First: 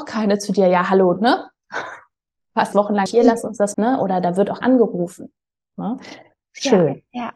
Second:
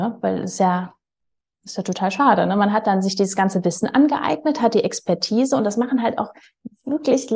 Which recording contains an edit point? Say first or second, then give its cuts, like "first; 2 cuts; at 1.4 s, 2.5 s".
first; 5 cuts; at 1.2 s, 2.7 s, 3.1 s, 3.7 s, 4.6 s